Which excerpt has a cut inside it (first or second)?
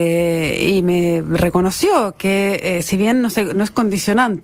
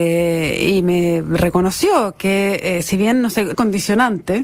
second